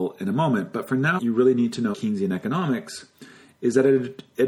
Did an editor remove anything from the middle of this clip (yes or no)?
yes